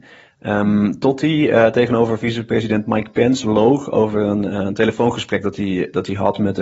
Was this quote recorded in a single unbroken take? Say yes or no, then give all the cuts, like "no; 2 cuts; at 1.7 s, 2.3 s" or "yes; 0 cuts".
yes; 0 cuts